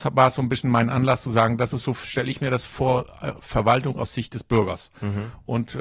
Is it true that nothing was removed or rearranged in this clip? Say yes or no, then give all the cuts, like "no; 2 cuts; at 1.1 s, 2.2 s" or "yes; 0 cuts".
yes; 0 cuts